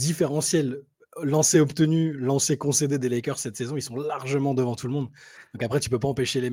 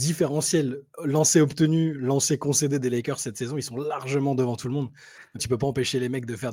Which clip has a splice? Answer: second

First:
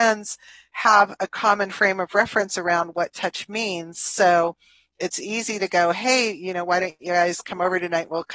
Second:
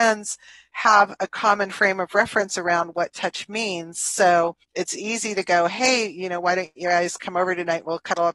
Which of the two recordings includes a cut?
second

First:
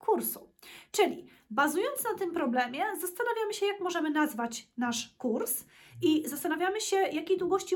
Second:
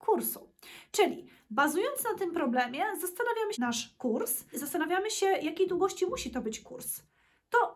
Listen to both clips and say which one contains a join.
second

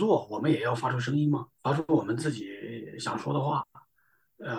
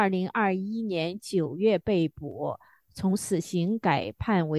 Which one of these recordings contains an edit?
first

